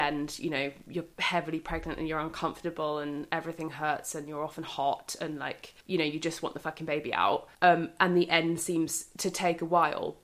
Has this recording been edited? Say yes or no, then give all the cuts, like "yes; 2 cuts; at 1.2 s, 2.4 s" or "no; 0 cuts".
yes; 3 cuts; at 1.1 s, 5.8 s, 7.5 s